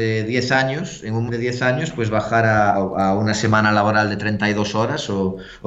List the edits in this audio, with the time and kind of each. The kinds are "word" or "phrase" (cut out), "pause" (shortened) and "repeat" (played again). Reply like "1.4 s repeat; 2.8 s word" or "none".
1.3 s word; 2.7 s word